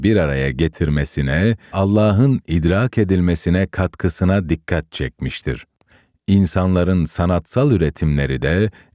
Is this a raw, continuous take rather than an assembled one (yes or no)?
no